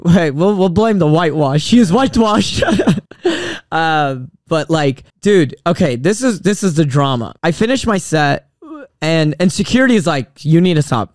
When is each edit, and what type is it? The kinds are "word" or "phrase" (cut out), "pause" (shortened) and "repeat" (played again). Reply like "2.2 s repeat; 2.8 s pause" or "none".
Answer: 3.1 s pause; 5.1 s pause; 7.4 s pause